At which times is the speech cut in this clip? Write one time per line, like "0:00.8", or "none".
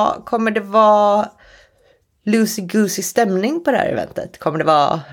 none

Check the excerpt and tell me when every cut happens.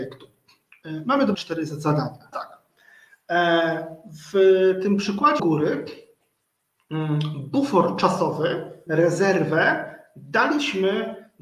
0:01.3
0:02.3
0:05.4
0:08.9

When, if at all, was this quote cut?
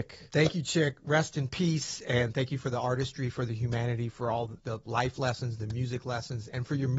0:04.6

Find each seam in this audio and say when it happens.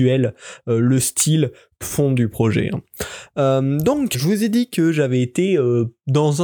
0:01.8
0:04.1

